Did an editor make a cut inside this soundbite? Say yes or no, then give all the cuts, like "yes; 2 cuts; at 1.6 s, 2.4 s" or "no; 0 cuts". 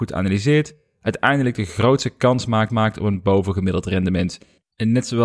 yes; 1 cut; at 2.7 s